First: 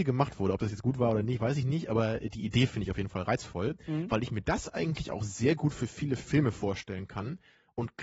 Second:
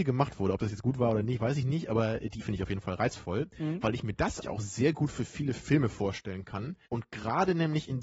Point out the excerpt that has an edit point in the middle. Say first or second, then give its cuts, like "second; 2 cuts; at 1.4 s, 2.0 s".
second; 3 cuts; at 2.4 s, 4.4 s, 6.9 s